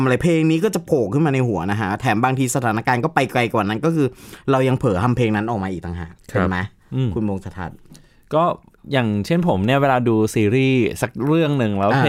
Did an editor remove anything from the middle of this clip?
no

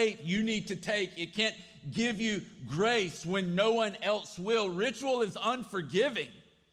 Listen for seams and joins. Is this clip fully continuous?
yes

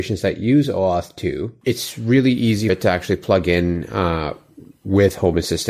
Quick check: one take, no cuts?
no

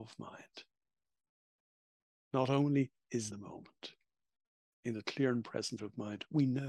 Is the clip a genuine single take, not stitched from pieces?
no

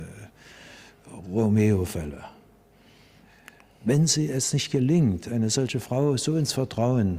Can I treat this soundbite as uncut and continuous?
yes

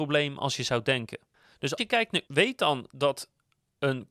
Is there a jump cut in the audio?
yes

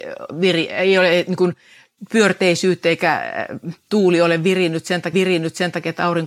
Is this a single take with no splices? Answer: no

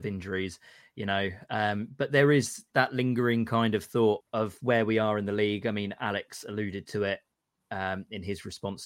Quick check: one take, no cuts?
no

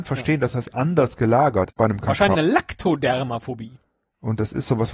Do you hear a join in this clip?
yes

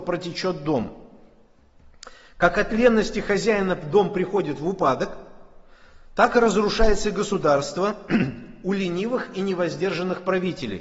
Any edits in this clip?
no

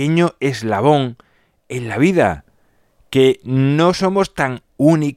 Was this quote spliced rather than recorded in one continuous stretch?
no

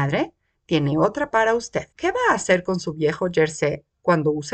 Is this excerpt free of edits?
no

